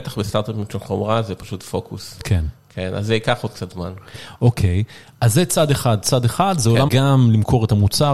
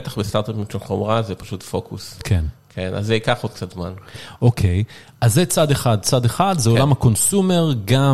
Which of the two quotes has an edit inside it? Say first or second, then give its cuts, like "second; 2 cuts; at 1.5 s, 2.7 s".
first; 1 cut; at 6.9 s